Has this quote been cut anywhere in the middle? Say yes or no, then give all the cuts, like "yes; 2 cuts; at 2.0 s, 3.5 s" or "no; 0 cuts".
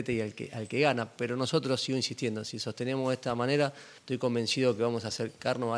yes; 1 cut; at 4.0 s